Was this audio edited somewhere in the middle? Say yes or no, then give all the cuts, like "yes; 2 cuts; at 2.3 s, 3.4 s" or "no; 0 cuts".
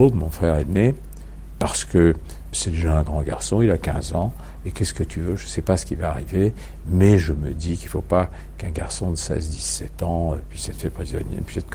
yes; 1 cut; at 2.5 s